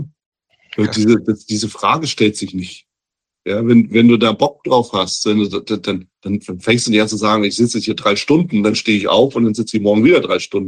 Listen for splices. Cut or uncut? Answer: cut